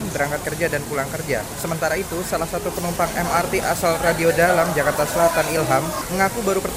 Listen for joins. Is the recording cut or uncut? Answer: uncut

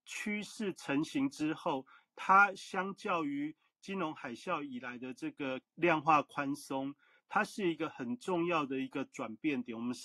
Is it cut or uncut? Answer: cut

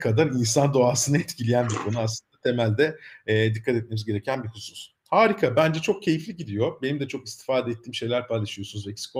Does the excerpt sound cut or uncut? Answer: uncut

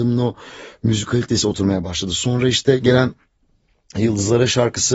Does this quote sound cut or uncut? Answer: uncut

